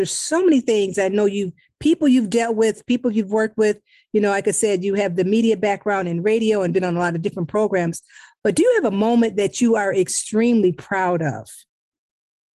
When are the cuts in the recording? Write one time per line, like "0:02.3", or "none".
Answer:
none